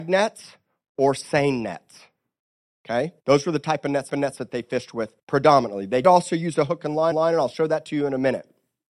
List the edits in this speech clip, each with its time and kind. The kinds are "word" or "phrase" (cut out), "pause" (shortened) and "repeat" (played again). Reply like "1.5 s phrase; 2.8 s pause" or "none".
3.2 s pause; 4.1 s repeat; 5.2 s pause; 6.0 s word; 7.1 s repeat

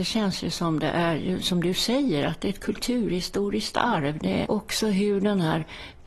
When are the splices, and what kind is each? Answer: 4.4 s word

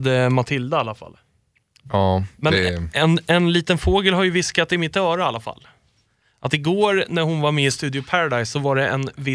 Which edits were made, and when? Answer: none

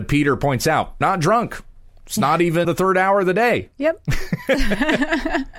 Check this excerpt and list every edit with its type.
1.0 s word; 2.6 s word; 3.7 s pause

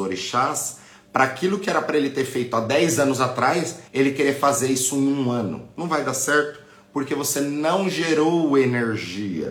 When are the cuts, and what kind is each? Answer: 3.9 s pause

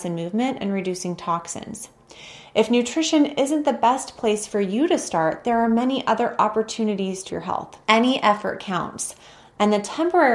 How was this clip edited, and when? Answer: 7.3 s word; 7.8 s pause

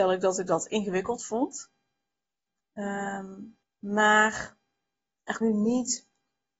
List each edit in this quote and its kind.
3.6 s pause; 5.4 s word

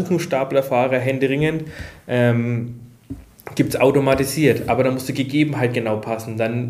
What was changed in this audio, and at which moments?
none

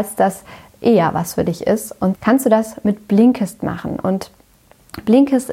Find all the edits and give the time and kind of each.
2.1 s word

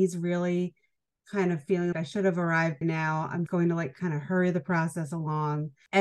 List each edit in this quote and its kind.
1.9 s word; 2.8 s word; 3.5 s word

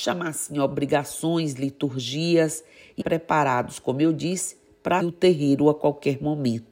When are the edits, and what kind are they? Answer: 3.0 s word; 5.0 s word

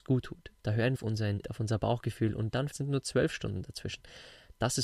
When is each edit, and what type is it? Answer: 1.0 s word; 1.4 s word; 2.7 s word

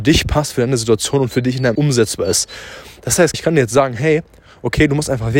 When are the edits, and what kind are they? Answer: 1.7 s word; 3.3 s word

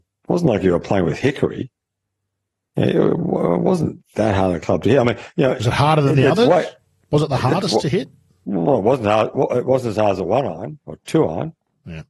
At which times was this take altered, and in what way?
none

